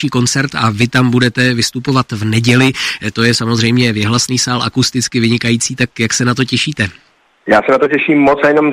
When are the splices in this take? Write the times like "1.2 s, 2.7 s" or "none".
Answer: none